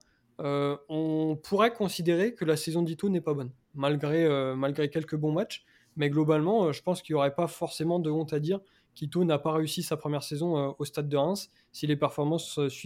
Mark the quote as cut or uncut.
uncut